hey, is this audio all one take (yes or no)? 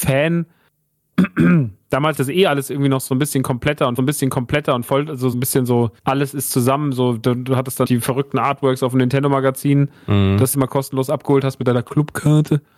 no